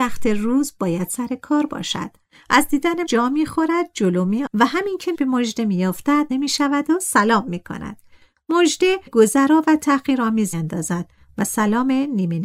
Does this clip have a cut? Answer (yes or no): yes